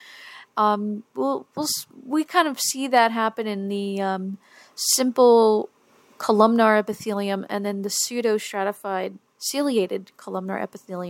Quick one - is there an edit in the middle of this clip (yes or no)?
no